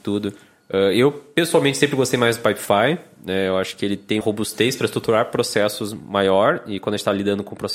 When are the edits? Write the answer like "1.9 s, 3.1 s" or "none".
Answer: 4.2 s